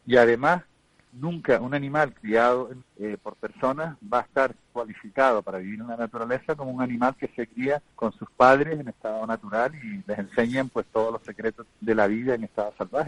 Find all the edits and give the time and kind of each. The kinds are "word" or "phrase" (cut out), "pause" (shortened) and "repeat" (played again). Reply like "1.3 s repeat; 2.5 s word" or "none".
2.8 s phrase; 7.9 s pause; 11.7 s word

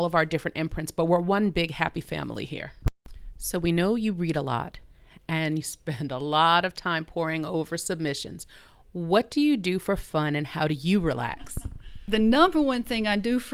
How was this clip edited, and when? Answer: none

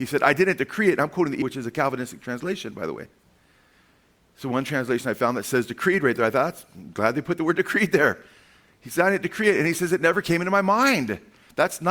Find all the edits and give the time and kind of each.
1.4 s word

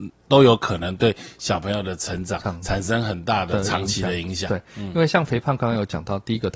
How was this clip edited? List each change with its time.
none

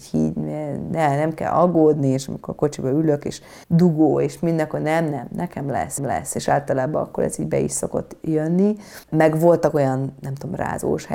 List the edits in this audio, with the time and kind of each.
3.6 s pause; 6.0 s repeat; 9.0 s pause

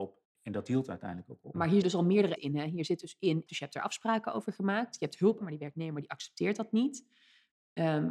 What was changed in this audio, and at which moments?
1.8 s word; 2.4 s word; 3.5 s phrase; 5.4 s word

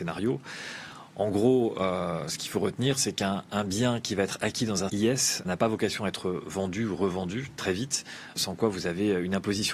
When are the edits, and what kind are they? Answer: 4.9 s word; 5.4 s word; 8.4 s word

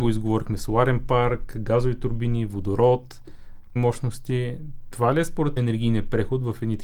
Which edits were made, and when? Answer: 3.8 s word; 5.6 s word

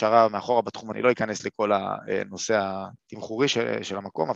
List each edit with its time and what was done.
0.9 s word; 3.0 s pause

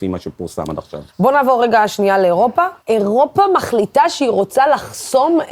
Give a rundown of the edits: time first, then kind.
1.1 s pause; 2.8 s pause

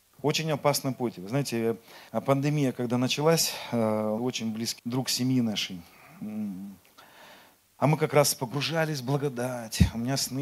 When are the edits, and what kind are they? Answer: 2.1 s pause; 4.2 s phrase; 4.8 s word

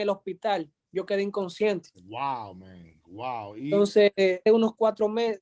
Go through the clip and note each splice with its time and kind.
1.9 s pause; 4.5 s word

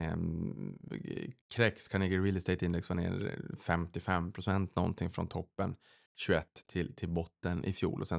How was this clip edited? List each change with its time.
none

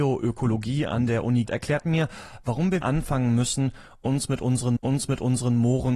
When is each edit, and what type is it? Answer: 1.5 s word; 2.8 s word; 4.8 s repeat

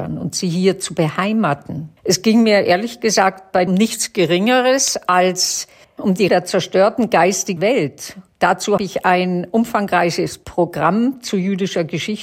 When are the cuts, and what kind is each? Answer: 2.0 s pause; 3.7 s phrase; 5.8 s pause; 6.3 s word; 7.6 s word; 8.8 s word

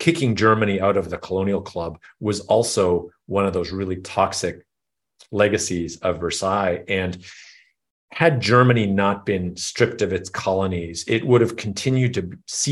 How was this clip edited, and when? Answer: none

